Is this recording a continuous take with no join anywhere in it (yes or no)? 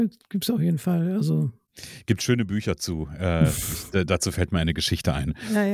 yes